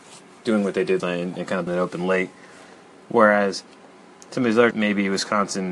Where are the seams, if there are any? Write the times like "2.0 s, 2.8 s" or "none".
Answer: 1.0 s, 1.7 s, 4.7 s

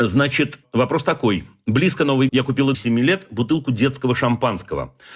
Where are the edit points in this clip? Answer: 2.3 s, 2.7 s

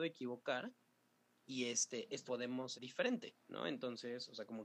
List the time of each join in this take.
2.3 s, 2.8 s, 3.4 s

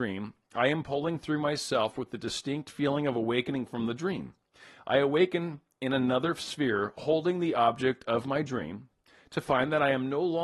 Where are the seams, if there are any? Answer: none

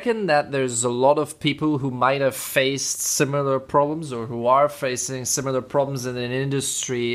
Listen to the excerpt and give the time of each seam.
none

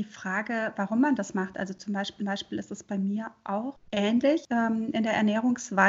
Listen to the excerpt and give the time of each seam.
2.2 s

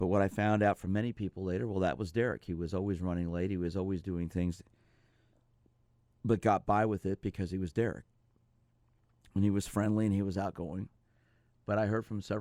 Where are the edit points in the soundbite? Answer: none

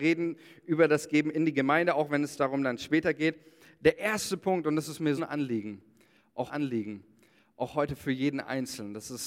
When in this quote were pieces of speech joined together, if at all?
5.2 s, 6.5 s

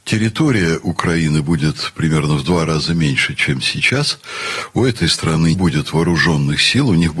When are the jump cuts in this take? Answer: 5.5 s

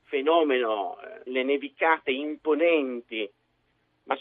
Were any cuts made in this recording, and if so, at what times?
1.3 s

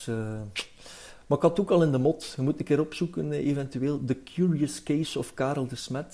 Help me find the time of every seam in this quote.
none

